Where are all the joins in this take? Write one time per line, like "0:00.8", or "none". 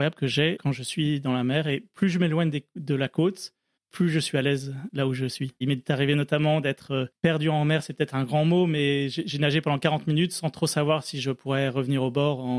0:03.8